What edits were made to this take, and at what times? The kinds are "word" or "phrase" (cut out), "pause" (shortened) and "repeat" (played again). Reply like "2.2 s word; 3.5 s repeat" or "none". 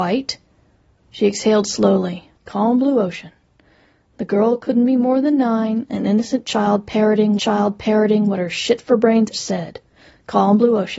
2.4 s pause; 7.4 s repeat; 9.3 s word